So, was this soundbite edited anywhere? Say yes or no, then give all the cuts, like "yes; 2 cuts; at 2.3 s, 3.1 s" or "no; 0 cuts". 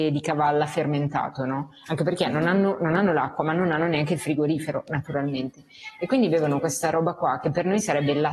no; 0 cuts